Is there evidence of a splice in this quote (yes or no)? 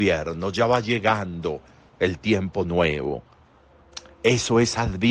no